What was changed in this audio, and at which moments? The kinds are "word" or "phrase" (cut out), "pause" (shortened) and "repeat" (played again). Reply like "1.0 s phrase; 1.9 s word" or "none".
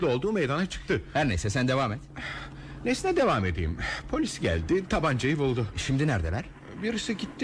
none